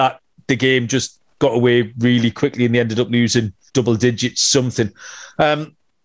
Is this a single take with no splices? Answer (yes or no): no